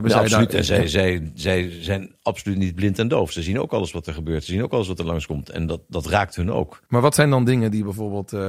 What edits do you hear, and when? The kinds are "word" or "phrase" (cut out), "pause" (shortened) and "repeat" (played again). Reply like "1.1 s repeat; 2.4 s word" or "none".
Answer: 6.9 s pause

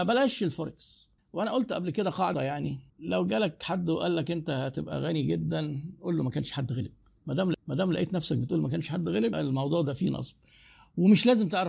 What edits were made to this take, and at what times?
1.2 s pause; 2.3 s phrase; 2.9 s pause; 7.5 s repeat; 9.3 s word

